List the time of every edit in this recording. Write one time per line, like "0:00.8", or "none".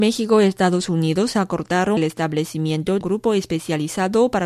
0:02.0
0:03.0